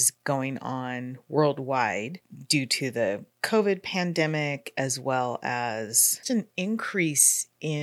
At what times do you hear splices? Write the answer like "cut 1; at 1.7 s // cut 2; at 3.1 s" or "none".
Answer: cut 1; at 6.2 s